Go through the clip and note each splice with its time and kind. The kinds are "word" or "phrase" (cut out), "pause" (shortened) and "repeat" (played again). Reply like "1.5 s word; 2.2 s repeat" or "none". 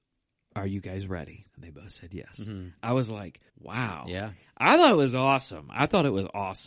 1.5 s pause; 3.5 s pause